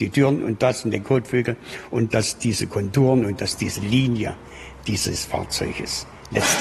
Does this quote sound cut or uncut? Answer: uncut